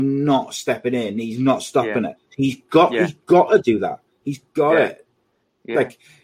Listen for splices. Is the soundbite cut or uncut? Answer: cut